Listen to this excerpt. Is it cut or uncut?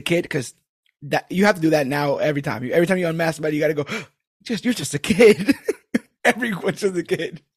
uncut